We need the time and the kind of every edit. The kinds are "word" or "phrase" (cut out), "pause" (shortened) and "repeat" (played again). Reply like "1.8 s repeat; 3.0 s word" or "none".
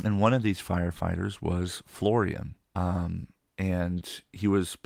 2.6 s pause